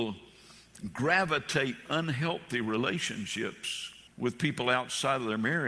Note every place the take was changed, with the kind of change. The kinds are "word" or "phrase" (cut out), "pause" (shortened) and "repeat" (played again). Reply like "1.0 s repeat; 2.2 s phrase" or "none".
1.9 s word; 4.1 s pause